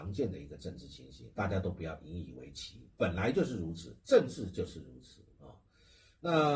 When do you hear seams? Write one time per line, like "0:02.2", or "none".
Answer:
0:01.3
0:04.0